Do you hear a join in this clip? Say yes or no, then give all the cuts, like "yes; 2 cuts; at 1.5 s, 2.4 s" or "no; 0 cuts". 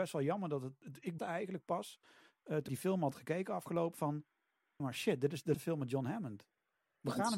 yes; 5 cuts; at 1.2 s, 2.7 s, 3.9 s, 4.8 s, 5.5 s